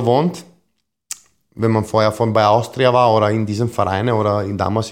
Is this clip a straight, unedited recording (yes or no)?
yes